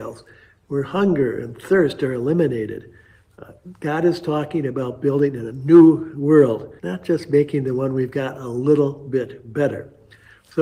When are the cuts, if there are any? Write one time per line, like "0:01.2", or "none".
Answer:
0:06.8